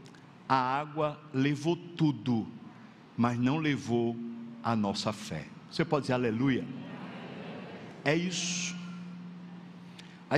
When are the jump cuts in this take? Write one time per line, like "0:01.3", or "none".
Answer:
none